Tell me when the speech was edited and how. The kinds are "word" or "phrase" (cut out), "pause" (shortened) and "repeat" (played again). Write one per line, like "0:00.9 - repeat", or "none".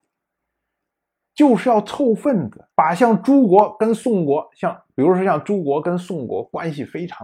0:02.7 - pause